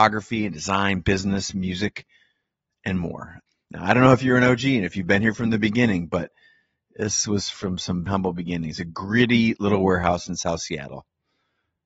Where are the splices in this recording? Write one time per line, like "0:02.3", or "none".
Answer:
0:08.1

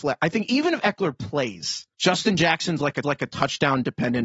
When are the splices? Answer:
0:01.9
0:03.0

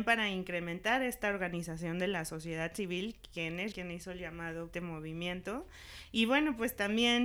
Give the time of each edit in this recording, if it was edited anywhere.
0:03.7
0:04.7

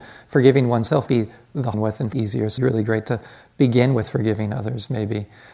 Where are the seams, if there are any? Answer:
0:01.1
0:01.7
0:02.1
0:02.6

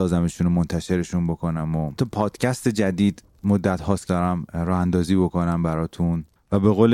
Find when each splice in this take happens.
0:02.0
0:04.1

